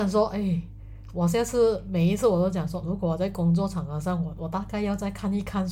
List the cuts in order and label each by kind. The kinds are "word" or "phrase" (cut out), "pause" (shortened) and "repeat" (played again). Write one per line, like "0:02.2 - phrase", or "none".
0:02.8 - word